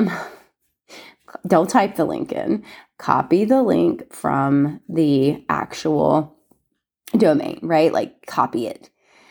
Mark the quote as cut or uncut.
uncut